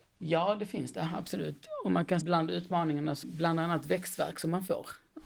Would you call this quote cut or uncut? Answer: cut